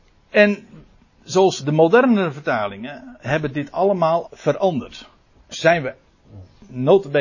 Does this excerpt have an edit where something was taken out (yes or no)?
yes